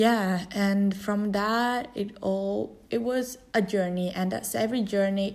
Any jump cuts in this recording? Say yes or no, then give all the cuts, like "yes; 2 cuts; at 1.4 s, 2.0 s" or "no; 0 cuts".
no; 0 cuts